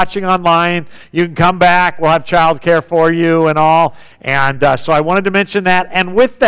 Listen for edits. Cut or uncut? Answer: uncut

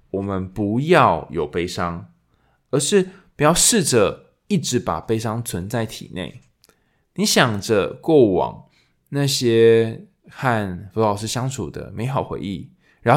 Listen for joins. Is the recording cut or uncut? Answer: uncut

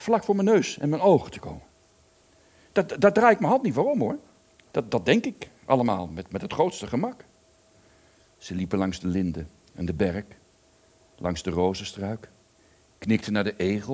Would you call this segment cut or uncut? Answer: uncut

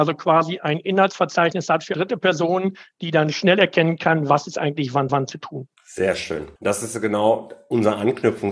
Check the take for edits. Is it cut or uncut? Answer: cut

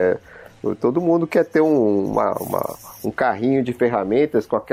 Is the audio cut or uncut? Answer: uncut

